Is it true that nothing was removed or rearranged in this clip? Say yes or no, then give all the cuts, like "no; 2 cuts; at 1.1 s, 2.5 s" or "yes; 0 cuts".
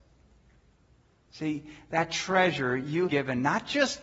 no; 1 cut; at 3.1 s